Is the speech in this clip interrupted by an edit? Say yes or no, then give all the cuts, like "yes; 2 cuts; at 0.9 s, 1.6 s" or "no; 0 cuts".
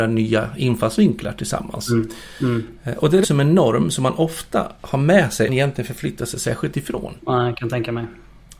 yes; 4 cuts; at 3.2 s, 5.5 s, 6.7 s, 7.2 s